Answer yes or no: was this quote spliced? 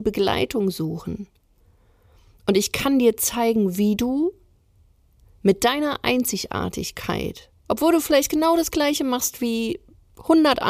no